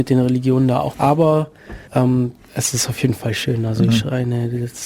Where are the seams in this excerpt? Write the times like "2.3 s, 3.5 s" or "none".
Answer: 0.9 s, 1.9 s